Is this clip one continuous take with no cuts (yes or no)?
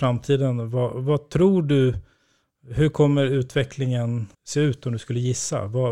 no